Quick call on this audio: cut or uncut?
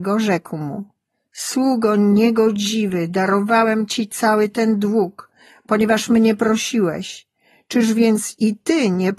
uncut